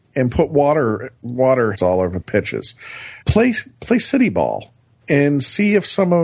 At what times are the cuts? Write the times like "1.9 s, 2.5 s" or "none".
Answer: 1.7 s, 2.2 s, 3.2 s

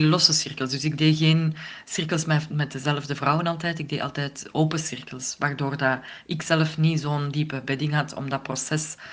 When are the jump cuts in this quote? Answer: none

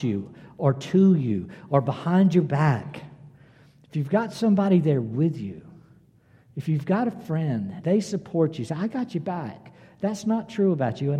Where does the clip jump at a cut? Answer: 7.8 s

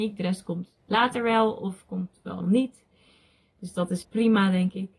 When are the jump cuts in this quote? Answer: 2.4 s, 4.0 s

